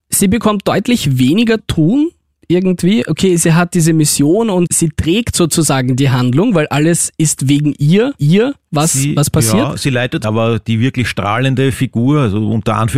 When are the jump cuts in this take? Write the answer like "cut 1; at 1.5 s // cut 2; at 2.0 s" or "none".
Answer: cut 1; at 1.6 s // cut 2; at 4.7 s // cut 3; at 8.2 s // cut 4; at 10.2 s